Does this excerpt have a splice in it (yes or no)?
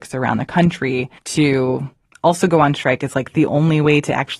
yes